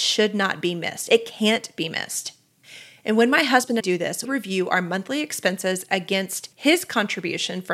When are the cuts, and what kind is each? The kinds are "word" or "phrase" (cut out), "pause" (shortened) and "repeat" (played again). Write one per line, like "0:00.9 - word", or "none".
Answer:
0:03.8 - phrase
0:04.2 - word
0:06.5 - pause